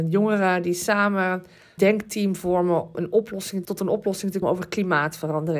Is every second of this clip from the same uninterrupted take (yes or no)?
no